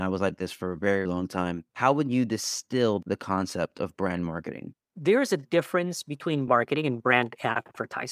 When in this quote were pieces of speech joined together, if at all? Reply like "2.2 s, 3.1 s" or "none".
1.1 s, 1.7 s, 4.8 s, 6.5 s

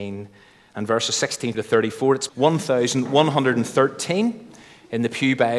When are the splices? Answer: 1.5 s, 2.3 s

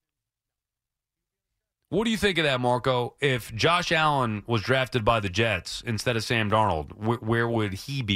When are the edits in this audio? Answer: none

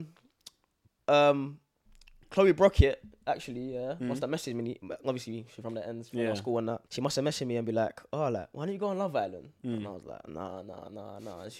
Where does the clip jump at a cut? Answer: 6.9 s

